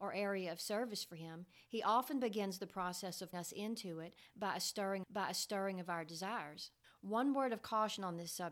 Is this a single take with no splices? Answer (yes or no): no